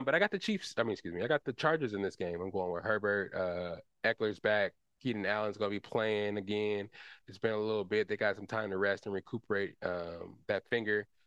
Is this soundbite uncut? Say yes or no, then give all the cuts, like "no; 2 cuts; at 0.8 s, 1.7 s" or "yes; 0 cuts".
yes; 0 cuts